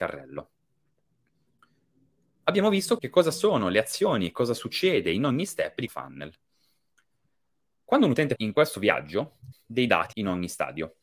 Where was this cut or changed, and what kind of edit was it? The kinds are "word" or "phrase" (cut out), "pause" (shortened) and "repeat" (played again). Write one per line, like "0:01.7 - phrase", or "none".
0:03.0 - word
0:05.9 - word
0:08.4 - word
0:09.5 - word
0:10.1 - word